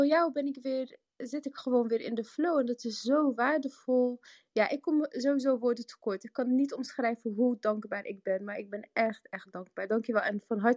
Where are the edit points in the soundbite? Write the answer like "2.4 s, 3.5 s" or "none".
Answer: none